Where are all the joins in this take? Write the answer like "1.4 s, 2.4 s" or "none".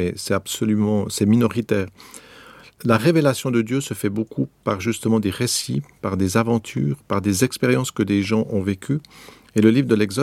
none